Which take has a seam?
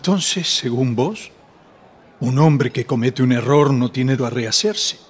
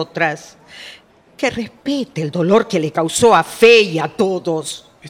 first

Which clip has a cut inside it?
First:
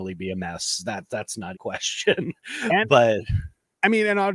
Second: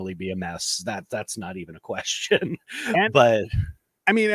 first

